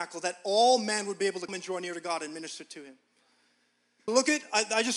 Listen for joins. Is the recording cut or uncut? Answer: cut